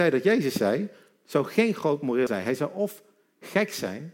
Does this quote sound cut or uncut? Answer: cut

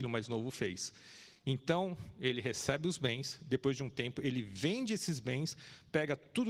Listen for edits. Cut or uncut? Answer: uncut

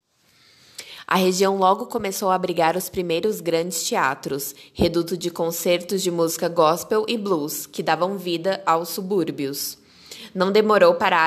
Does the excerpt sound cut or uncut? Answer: uncut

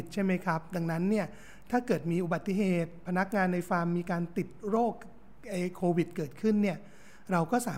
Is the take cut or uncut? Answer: uncut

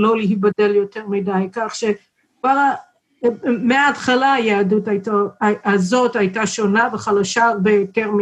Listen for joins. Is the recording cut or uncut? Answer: uncut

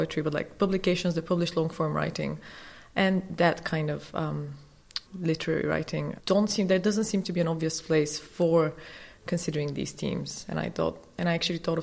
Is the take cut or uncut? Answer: cut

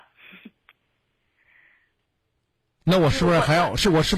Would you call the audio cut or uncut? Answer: uncut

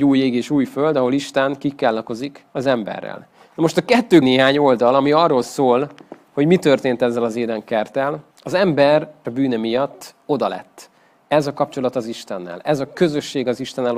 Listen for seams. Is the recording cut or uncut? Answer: cut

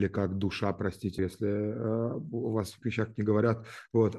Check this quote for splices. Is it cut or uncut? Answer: cut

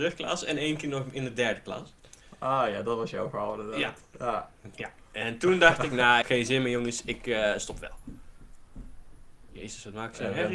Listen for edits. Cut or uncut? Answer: cut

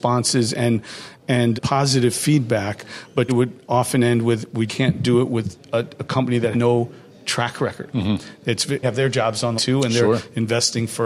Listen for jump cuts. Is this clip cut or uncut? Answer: cut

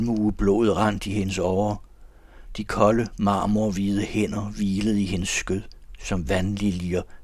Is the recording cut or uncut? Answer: uncut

